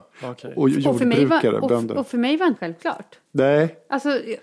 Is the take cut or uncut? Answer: cut